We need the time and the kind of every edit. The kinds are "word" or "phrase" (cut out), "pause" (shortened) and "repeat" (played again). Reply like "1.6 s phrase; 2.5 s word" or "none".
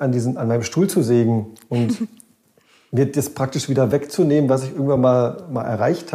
none